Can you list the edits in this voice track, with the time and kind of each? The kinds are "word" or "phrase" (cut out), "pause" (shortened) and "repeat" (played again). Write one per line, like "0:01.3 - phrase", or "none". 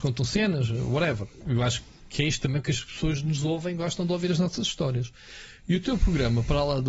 none